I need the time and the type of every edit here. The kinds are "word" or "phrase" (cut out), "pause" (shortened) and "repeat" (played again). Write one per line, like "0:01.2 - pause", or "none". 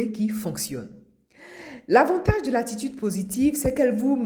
none